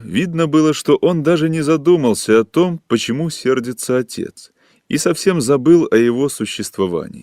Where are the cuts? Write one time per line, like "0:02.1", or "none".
none